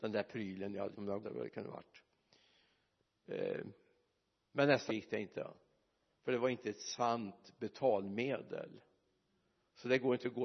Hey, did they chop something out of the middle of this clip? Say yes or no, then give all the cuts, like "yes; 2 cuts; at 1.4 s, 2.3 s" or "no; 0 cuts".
yes; 3 cuts; at 0.9 s, 1.2 s, 4.9 s